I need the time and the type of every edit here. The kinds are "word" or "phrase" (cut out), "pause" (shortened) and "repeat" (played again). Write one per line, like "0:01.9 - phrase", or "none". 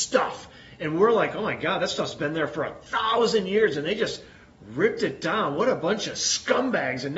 none